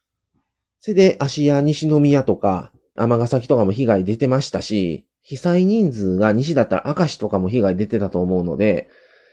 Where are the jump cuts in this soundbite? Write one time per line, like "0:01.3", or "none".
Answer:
0:03.0
0:05.1